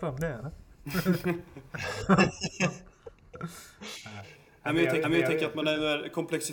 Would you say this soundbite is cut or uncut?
cut